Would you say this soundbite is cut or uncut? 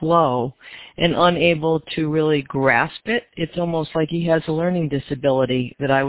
uncut